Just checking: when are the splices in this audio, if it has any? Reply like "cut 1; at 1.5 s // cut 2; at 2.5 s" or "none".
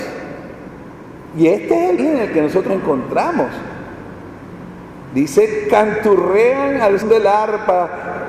cut 1; at 2.0 s // cut 2; at 2.7 s // cut 3; at 7.0 s